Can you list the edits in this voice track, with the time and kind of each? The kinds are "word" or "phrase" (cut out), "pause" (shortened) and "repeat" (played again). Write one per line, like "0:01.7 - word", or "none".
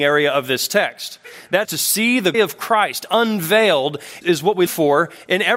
0:01.6 - word
0:02.3 - word
0:04.2 - word
0:04.7 - word